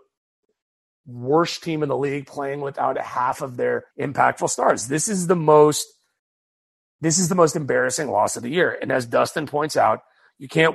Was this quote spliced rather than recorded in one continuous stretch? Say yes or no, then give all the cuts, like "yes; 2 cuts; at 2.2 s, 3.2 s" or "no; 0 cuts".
yes; 1 cut; at 3.9 s